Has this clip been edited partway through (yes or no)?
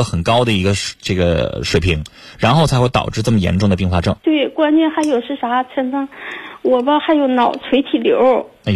yes